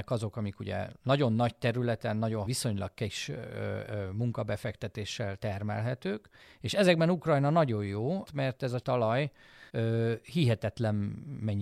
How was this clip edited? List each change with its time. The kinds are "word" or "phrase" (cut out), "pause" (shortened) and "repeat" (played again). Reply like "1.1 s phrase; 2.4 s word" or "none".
2.5 s word; 6.4 s pause; 8.2 s word; 8.8 s word; 9.7 s pause